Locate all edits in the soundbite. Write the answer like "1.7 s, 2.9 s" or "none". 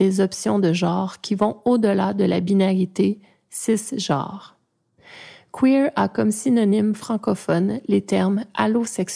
none